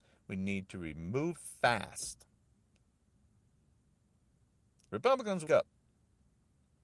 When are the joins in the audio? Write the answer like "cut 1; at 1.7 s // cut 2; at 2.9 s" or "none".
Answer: cut 1; at 1.4 s // cut 2; at 5.5 s